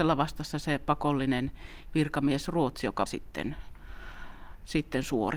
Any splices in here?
yes; 1 cut; at 3.1 s

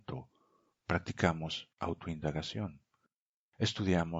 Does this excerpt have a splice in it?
no; 0 cuts

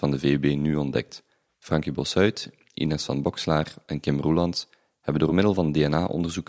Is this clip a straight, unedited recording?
yes; 0 cuts

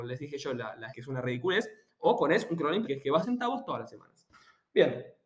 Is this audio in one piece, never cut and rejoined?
no; 3 cuts; at 0.9 s, 2.8 s, 3.2 s

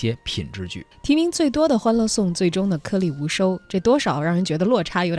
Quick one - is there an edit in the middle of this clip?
yes; 1 cut; at 0.9 s

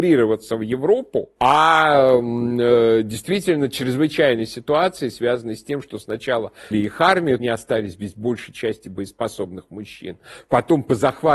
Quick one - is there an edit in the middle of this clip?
yes; 3 cuts; at 1.4 s, 6.7 s, 7.4 s

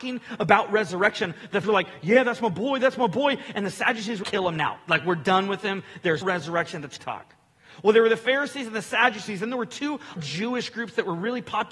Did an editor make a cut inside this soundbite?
yes; 5 cuts; at 1.6 s, 4.2 s, 6.2 s, 7.0 s, 10.2 s

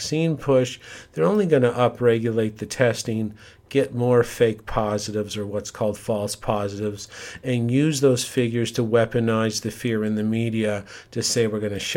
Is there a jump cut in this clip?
no; 0 cuts

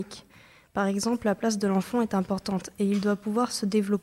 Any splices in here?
no; 0 cuts

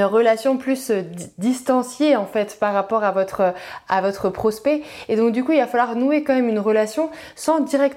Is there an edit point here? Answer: no; 0 cuts

